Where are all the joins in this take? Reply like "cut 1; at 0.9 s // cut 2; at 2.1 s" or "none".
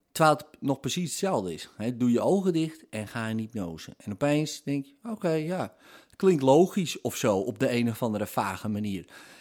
none